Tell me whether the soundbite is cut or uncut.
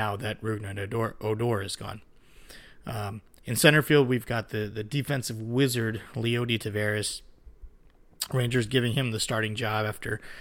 uncut